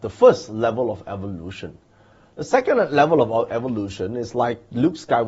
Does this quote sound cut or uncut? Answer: uncut